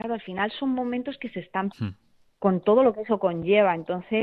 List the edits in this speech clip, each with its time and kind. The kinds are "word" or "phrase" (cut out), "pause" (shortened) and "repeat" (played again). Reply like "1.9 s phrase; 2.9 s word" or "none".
1.7 s word